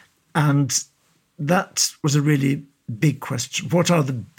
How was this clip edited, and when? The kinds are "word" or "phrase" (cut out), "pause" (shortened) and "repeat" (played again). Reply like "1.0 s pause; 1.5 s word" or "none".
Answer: none